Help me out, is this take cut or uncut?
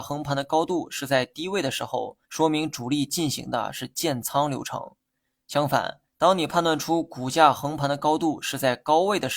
cut